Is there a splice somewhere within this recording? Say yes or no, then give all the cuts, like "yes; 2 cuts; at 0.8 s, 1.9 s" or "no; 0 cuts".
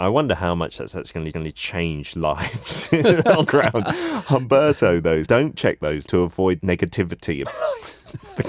yes; 6 cuts; at 1.3 s, 3.4 s, 5.2 s, 6.1 s, 6.6 s, 7.4 s